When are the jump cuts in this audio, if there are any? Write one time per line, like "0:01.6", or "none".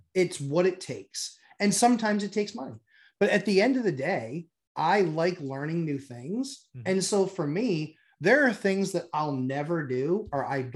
none